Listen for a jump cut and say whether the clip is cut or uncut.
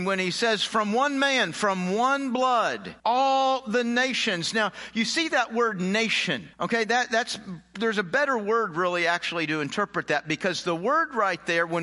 cut